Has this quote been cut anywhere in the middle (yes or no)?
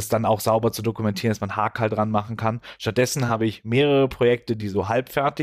no